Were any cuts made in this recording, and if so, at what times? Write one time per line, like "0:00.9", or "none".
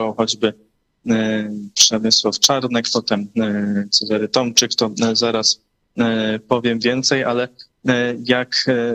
none